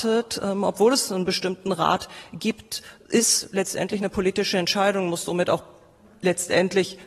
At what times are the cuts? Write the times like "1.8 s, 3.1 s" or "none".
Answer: none

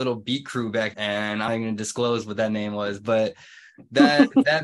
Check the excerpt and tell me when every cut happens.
0.9 s, 1.5 s

